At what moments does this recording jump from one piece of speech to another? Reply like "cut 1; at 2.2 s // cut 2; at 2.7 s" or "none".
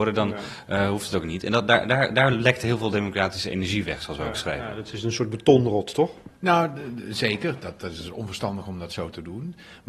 none